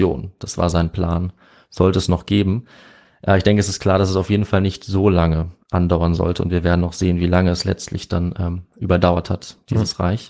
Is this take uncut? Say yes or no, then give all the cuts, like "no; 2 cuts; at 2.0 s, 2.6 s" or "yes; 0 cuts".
yes; 0 cuts